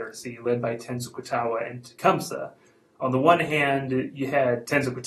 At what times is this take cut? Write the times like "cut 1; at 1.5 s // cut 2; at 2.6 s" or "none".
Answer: none